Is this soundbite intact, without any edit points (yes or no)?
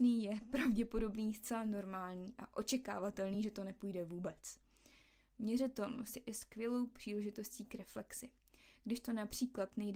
yes